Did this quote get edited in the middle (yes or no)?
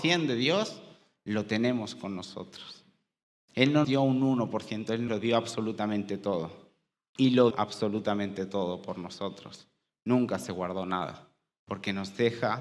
yes